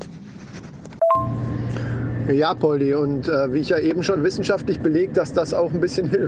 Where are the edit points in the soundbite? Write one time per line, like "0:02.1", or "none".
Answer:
0:04.2